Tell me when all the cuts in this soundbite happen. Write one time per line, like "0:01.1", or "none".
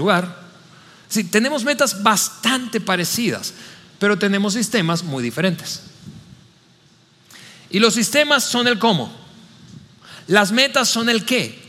none